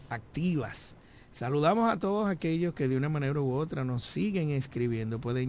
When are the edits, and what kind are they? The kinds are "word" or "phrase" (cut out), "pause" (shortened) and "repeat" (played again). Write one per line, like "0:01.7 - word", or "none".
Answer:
none